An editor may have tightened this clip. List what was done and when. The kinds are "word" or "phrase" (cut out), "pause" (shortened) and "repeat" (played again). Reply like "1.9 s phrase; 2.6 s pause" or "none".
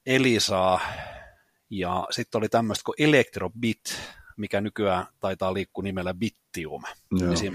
none

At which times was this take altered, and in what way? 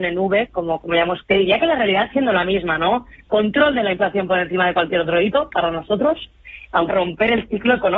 1.2 s word; 2.1 s word; 6.9 s phrase

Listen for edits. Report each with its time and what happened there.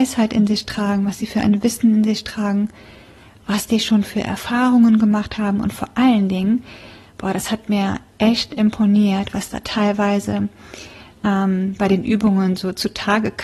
none

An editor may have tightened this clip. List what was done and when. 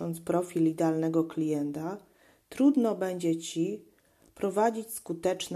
none

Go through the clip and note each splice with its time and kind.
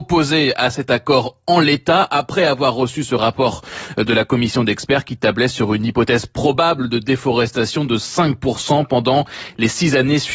none

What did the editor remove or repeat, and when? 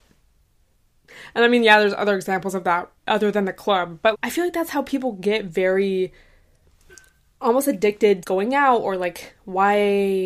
3.0 s pause; 4.1 s word; 8.2 s phrase

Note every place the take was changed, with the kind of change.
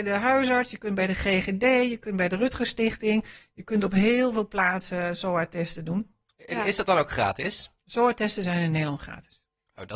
none

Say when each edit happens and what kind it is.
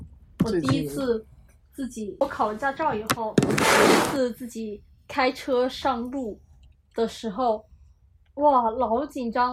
none

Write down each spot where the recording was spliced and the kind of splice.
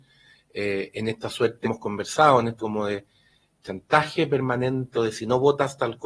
1.6 s word; 2.6 s word; 4.9 s word

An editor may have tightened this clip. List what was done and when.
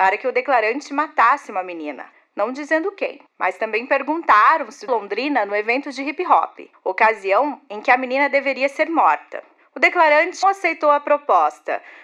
2.1 s pause; 3.3 s pause; 4.9 s phrase; 6.7 s pause; 10.4 s word

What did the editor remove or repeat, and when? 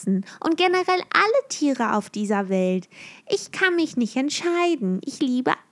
none

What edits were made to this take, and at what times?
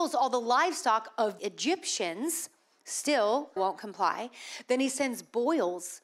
1.4 s word; 3.6 s word

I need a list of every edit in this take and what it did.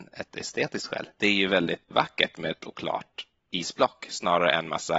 1.9 s word; 2.6 s word

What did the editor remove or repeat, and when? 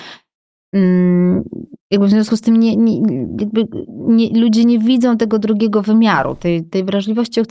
1.8 s pause

